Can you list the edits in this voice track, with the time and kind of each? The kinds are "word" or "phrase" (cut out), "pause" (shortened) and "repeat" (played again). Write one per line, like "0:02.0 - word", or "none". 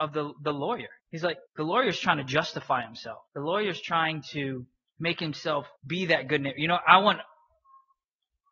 0:01.0 - pause
0:01.5 - pause
0:03.3 - pause
0:04.9 - pause
0:05.8 - pause